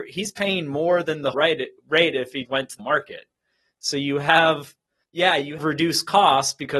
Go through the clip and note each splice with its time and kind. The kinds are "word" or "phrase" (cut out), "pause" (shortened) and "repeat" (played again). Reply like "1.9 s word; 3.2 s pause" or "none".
1.3 s word; 1.8 s pause; 2.5 s word; 2.8 s word; 5.0 s pause; 5.6 s word